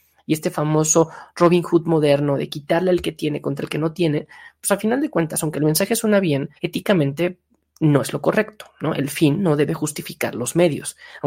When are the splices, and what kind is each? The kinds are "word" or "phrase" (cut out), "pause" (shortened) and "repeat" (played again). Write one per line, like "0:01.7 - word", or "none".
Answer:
0:06.6 - pause